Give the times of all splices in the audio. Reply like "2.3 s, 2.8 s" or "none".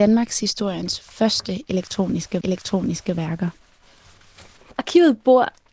2.4 s